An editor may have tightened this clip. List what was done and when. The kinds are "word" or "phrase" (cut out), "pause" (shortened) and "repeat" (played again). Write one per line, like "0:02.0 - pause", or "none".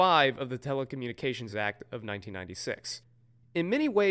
none